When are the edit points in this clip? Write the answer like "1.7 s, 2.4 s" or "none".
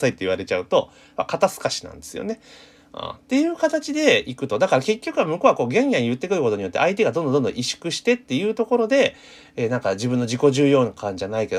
none